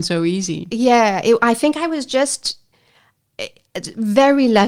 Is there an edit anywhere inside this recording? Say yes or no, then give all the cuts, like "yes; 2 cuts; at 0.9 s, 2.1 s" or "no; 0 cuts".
no; 0 cuts